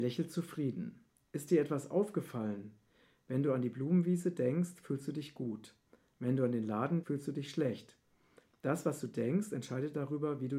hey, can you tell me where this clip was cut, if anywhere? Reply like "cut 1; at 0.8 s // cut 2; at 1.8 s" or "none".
cut 1; at 7.0 s